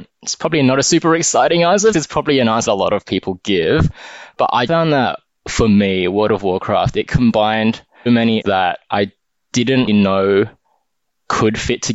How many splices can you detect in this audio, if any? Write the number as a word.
six